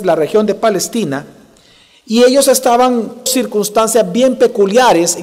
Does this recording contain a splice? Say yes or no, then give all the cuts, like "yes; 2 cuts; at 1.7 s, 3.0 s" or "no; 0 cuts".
yes; 1 cut; at 3.3 s